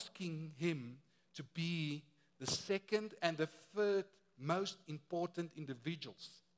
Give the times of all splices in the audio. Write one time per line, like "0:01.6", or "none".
none